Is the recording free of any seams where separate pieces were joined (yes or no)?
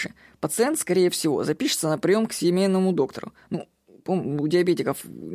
yes